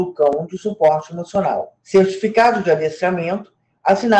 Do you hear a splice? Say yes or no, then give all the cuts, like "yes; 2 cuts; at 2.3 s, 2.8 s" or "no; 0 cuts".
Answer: yes; 1 cut; at 1.8 s